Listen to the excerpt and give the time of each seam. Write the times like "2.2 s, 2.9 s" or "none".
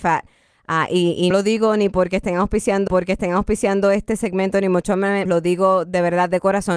1.3 s, 2.9 s, 5.3 s